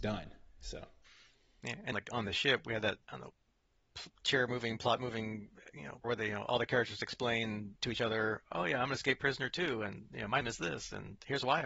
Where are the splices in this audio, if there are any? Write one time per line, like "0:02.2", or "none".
0:01.9
0:03.0
0:06.0
0:10.4